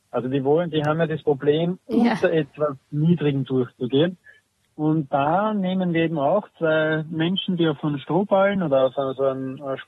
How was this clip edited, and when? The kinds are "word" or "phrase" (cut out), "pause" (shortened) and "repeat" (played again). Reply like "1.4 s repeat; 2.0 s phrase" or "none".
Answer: none